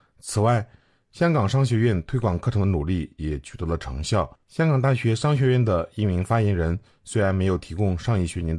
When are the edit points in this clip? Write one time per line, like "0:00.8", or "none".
0:04.4